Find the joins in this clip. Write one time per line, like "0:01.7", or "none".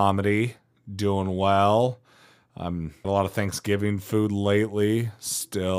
0:03.0